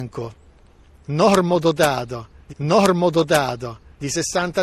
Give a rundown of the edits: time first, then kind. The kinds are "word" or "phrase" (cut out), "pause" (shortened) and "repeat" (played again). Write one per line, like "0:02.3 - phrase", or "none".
0:02.5 - repeat

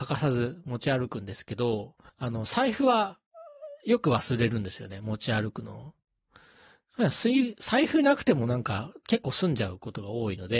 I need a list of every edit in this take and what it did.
0:02.1 - pause

